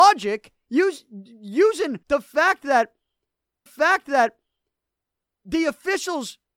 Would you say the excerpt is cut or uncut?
cut